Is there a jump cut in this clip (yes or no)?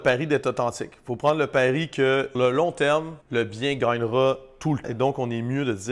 yes